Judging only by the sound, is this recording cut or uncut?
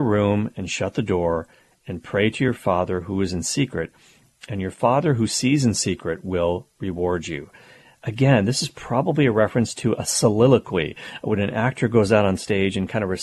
uncut